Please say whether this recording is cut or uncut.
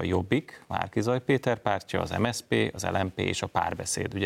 uncut